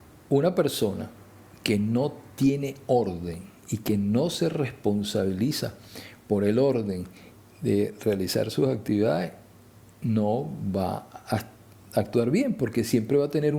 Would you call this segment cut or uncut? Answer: uncut